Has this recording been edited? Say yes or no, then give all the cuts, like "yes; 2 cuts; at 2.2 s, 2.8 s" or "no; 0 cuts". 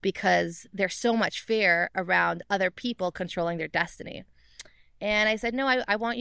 no; 0 cuts